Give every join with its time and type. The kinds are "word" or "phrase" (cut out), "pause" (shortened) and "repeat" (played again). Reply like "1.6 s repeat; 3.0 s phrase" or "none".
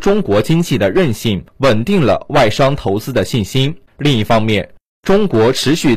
1.5 s pause; 3.9 s pause

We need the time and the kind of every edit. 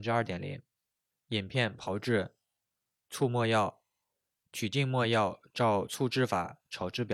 none

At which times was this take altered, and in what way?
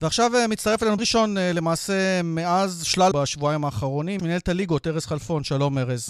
1.0 s word; 3.1 s phrase; 4.2 s phrase

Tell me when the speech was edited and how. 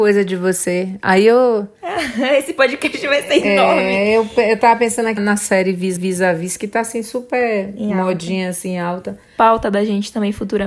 5.2 s word; 6.0 s repeat

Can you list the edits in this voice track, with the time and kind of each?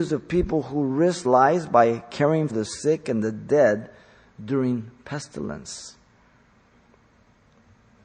1.2 s word; 2.5 s word

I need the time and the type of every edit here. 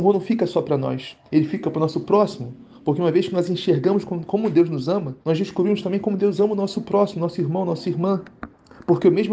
1.3 s pause; 5.2 s pause

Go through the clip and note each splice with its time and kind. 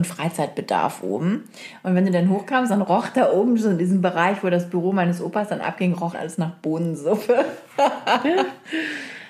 6.1 s word

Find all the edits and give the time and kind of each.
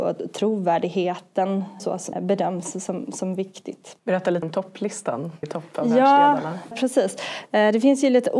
1.8 s phrase; 2.1 s phrase; 4.0 s pause; 4.4 s word; 5.4 s word; 6.7 s word

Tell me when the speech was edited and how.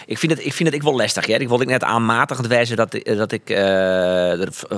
none

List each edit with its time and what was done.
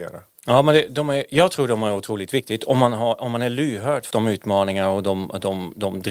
4.1 s word

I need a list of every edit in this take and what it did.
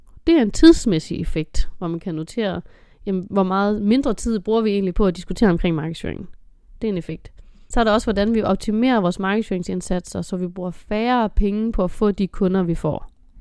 none

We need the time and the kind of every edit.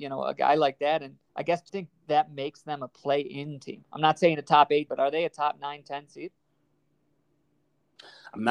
1.3 s pause; 1.7 s phrase; 4.9 s word

